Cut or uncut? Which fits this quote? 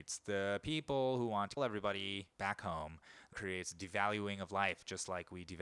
cut